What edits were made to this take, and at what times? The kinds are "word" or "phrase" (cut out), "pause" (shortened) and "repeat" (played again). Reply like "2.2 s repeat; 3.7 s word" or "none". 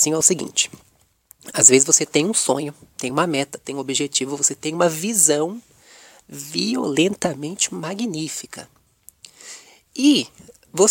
none